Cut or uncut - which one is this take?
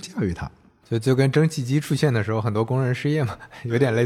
uncut